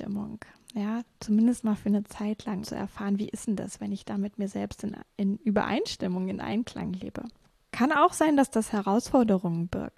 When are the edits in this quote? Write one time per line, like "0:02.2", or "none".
0:02.6
0:07.4